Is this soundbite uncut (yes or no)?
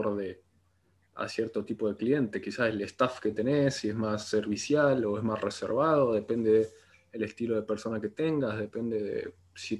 yes